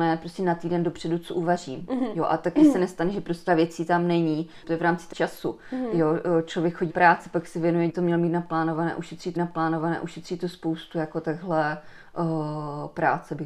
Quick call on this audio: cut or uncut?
cut